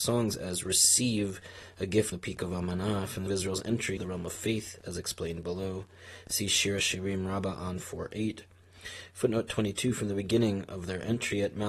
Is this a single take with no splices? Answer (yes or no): no